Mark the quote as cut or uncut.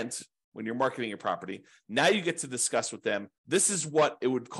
cut